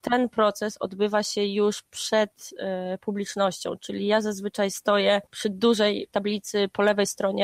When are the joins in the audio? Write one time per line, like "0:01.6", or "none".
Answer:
none